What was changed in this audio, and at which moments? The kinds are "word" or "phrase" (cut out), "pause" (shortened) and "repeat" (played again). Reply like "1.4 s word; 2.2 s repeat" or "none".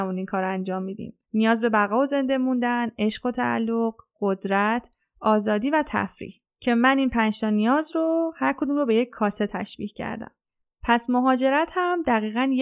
none